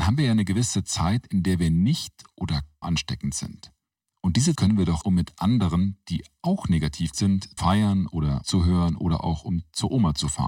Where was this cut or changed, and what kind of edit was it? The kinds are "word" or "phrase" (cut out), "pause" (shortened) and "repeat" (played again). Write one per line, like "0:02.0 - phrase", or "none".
0:02.8 - word
0:04.6 - word
0:05.0 - word
0:07.1 - word
0:07.6 - word
0:08.4 - word